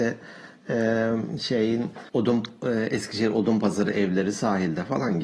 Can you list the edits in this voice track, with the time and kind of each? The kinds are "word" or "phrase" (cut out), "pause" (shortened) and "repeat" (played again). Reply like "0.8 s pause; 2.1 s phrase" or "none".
2.1 s pause